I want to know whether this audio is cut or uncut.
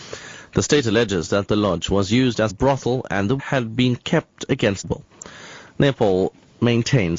cut